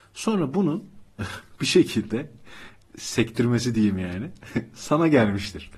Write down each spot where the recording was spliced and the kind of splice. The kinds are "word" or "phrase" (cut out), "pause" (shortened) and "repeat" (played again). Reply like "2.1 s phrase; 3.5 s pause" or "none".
none